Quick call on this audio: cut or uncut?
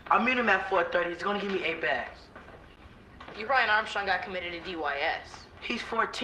cut